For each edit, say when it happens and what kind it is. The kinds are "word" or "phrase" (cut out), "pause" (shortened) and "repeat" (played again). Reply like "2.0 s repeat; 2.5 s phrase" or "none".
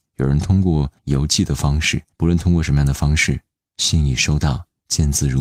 1.0 s pause; 2.1 s pause